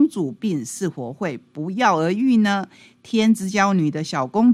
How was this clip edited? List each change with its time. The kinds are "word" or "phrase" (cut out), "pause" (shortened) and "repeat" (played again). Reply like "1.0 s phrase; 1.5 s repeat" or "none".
none